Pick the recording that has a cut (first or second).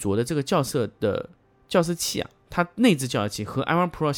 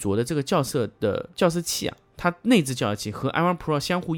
second